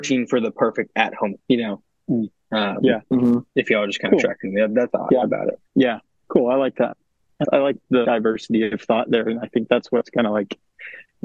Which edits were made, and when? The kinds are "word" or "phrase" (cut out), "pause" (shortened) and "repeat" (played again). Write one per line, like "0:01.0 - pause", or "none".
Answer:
0:01.4 - word
0:03.5 - pause
0:04.9 - phrase
0:05.7 - pause
0:07.4 - word
0:08.0 - word